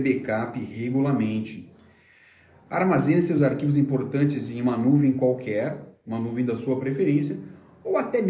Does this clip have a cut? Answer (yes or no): no